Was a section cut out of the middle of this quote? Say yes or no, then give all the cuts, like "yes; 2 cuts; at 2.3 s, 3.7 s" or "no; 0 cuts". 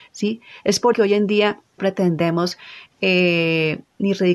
yes; 2 cuts; at 0.9 s, 1.8 s